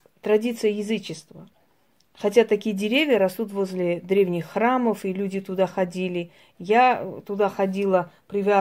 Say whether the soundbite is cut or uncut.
uncut